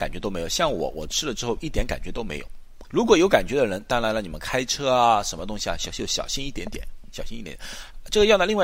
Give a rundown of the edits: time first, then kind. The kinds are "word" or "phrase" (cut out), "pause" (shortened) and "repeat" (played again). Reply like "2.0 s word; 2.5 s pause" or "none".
2.8 s word